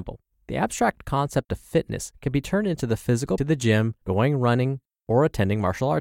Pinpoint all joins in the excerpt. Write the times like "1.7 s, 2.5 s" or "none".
2.1 s, 3.4 s, 4.0 s